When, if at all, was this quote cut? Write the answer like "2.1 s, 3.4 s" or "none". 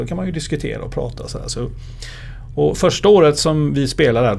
none